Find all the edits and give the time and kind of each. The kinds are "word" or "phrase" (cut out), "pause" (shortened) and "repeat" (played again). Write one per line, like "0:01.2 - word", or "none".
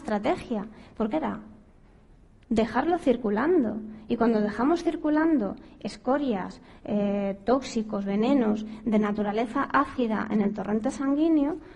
0:01.1 - phrase